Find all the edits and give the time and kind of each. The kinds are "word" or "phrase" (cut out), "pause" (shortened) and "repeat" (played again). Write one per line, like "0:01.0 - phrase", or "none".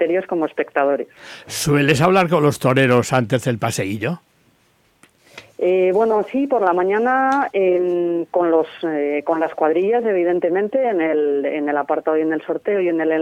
none

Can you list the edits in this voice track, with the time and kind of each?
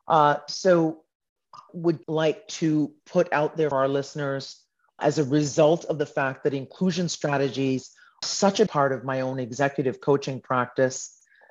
0:01.7 - word
0:02.0 - word
0:03.7 - word
0:05.0 - word
0:08.2 - word
0:08.7 - word

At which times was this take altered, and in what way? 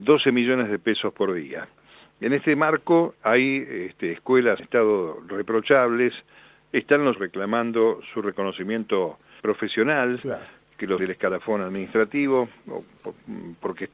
0:03.2 - word
0:04.6 - word
0:07.1 - word
0:09.4 - word
0:11.0 - word

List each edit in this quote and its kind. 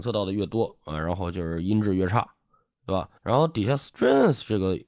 0:03.2 - pause

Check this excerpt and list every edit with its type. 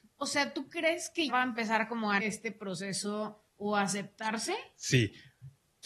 0:01.3 - word
0:02.2 - word
0:03.5 - pause

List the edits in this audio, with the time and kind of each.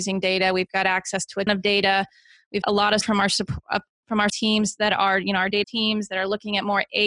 0:01.5 - word
0:02.6 - word
0:03.0 - word
0:04.3 - word
0:05.6 - word

